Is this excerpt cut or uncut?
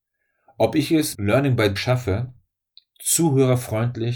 cut